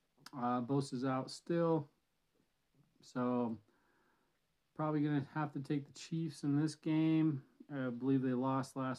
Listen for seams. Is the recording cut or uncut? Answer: uncut